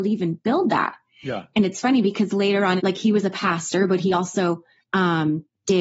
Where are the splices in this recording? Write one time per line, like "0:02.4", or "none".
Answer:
0:02.8
0:04.8